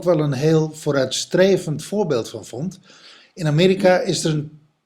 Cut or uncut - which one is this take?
uncut